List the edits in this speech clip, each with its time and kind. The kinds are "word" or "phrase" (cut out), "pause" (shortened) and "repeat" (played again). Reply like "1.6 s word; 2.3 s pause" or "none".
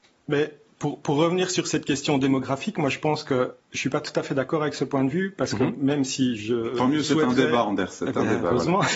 3.6 s pause